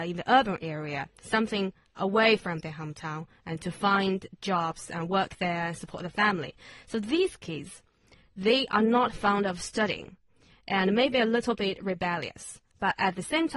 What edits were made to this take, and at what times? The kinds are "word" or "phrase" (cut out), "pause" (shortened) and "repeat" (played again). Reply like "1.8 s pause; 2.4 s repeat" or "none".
none